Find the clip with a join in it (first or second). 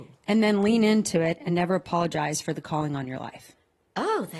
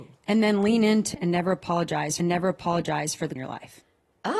second